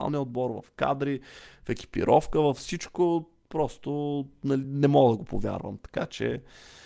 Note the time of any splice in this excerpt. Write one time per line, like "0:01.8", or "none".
none